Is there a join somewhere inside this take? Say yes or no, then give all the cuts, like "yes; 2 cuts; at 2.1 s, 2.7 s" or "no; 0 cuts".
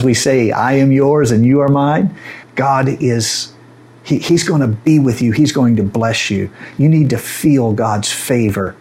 yes; 1 cut; at 2.4 s